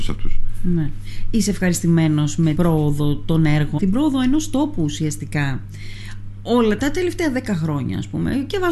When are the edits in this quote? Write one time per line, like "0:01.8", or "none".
0:02.5
0:03.8
0:06.8